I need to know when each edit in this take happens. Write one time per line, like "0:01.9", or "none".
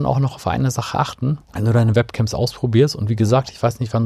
0:01.4

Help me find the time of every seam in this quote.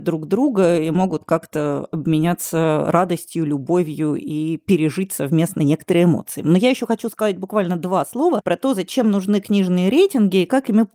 none

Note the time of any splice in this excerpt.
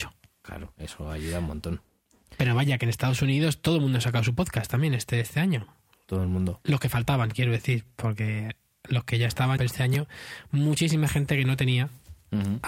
0:09.6

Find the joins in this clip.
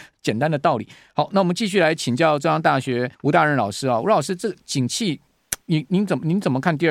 0:03.1
0:05.6

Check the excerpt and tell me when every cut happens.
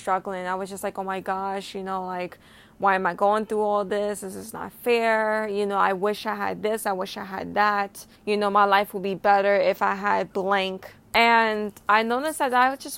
0:08.2
0:11.0

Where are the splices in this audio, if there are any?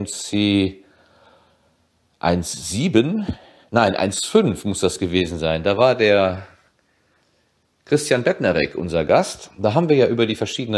none

